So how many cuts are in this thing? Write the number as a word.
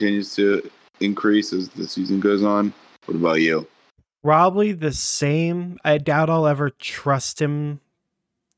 zero